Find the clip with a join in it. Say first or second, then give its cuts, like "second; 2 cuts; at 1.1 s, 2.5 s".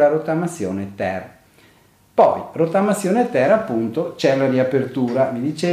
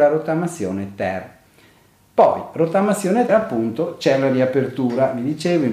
second; 1 cut; at 3.3 s